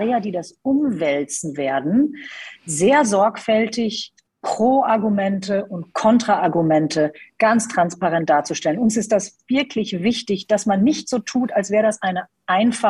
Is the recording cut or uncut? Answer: uncut